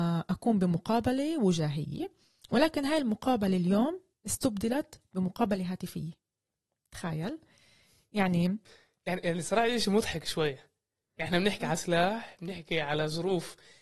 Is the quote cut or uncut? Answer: uncut